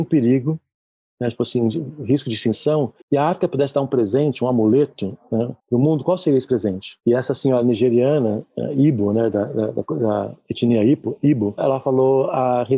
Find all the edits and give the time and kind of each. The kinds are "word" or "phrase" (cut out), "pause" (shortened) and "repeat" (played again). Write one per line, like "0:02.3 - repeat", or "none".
0:03.0 - pause
0:05.6 - pause